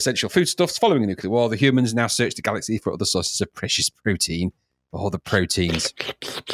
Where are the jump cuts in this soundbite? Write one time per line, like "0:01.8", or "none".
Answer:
none